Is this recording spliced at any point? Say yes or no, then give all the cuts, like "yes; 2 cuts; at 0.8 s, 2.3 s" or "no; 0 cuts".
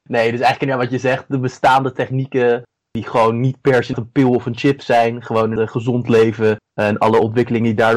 no; 0 cuts